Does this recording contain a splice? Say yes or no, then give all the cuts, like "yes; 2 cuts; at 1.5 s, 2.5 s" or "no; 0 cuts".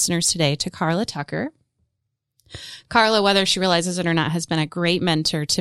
no; 0 cuts